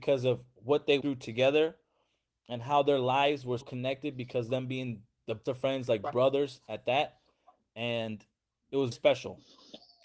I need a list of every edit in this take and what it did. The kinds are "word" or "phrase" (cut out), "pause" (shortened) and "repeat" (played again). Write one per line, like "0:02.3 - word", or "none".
0:01.0 - word
0:03.6 - word
0:05.5 - word
0:08.9 - word